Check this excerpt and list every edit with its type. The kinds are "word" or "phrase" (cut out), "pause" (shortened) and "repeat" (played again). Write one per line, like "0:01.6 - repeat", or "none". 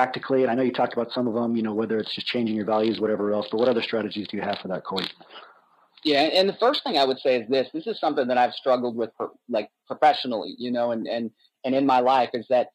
none